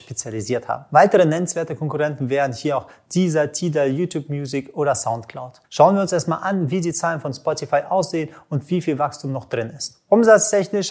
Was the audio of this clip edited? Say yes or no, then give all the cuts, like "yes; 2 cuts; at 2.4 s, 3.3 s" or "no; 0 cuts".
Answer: yes; 1 cut; at 5.6 s